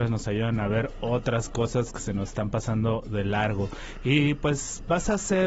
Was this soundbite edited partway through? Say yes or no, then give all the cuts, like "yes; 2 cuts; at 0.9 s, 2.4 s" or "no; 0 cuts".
no; 0 cuts